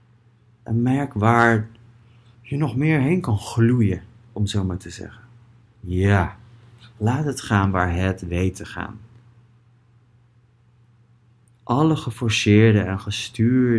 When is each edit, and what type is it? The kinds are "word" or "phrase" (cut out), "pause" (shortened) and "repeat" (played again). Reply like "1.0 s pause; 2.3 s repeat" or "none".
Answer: none